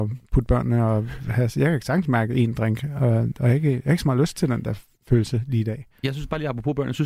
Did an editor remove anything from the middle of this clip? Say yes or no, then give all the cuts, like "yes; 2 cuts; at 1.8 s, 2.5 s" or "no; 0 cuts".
no; 0 cuts